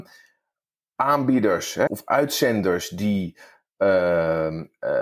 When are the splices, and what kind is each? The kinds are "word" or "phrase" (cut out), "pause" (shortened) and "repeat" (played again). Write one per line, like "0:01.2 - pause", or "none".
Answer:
0:01.9 - word